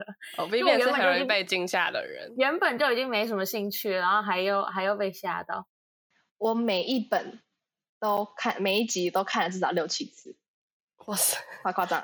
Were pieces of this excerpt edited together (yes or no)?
no